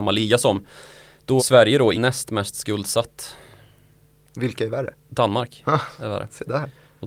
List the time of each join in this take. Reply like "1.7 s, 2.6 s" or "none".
1.4 s, 1.9 s